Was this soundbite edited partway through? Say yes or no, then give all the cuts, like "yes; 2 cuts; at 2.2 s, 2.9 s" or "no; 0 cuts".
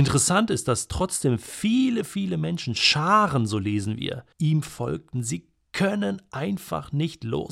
yes; 1 cut; at 4.3 s